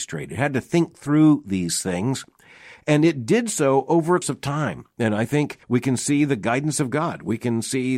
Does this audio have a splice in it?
yes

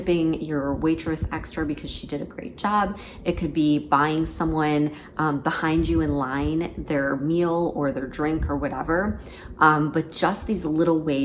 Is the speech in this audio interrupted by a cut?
no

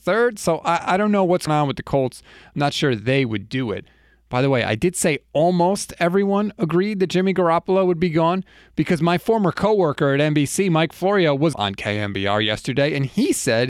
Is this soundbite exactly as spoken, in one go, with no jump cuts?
no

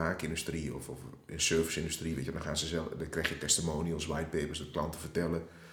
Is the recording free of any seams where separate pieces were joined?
yes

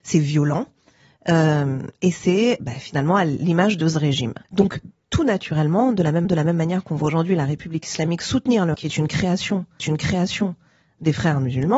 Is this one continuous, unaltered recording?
no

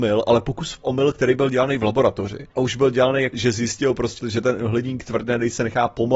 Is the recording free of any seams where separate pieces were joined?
no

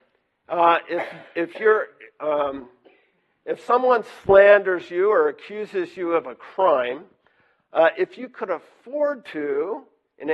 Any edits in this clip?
no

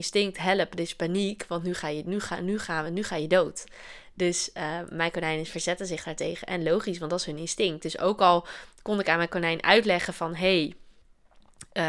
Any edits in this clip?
no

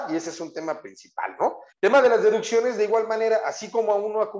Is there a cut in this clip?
yes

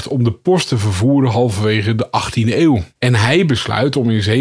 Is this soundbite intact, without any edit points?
no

